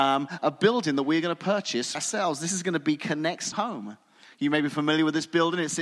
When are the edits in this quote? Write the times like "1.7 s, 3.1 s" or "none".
1.9 s, 3.5 s